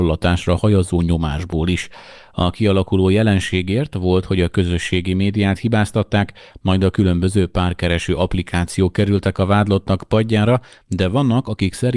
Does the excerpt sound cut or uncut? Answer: uncut